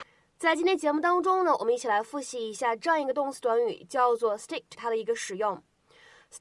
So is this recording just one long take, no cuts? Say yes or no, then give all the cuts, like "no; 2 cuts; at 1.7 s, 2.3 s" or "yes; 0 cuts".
no; 1 cut; at 4.7 s